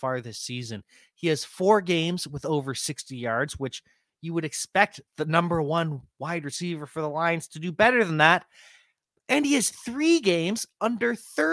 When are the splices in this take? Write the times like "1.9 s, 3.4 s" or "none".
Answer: 5.1 s